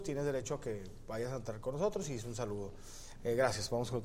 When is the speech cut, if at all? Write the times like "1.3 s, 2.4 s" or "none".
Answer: none